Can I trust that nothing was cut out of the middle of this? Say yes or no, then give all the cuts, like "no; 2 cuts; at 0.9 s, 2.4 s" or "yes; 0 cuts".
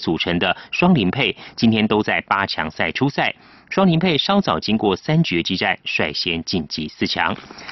yes; 0 cuts